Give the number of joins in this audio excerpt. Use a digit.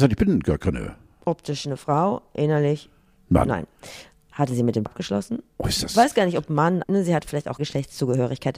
3